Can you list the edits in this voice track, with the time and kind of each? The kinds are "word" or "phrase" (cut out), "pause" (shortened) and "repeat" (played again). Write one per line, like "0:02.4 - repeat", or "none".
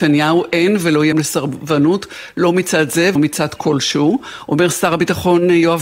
0:01.1 - word
0:03.2 - word